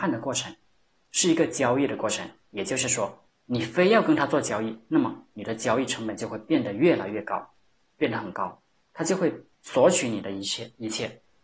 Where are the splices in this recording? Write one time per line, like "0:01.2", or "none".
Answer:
0:03.3
0:08.8
0:09.5